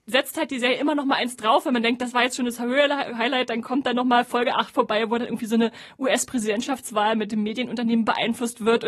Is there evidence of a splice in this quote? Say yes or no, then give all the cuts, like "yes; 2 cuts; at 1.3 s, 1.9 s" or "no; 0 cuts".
no; 0 cuts